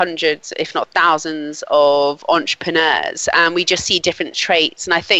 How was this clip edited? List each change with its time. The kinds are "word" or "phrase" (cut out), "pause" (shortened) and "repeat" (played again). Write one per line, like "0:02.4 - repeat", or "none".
none